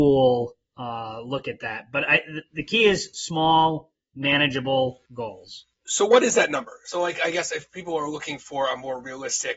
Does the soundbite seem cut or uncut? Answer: cut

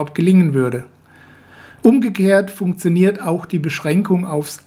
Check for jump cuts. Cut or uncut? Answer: uncut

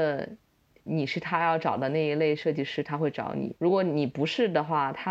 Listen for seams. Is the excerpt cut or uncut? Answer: cut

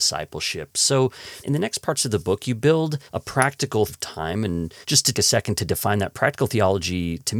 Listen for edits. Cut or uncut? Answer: cut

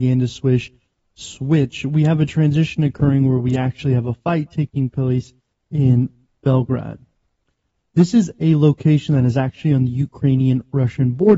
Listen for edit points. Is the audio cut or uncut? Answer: uncut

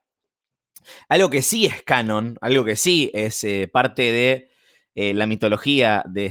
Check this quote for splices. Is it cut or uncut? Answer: uncut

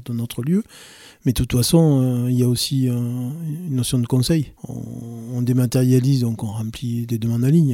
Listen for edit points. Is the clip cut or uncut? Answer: cut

